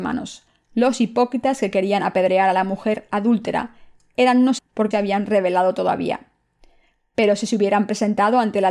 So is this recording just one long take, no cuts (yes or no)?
no